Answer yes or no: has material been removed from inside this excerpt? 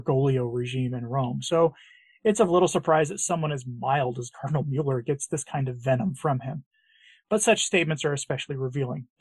no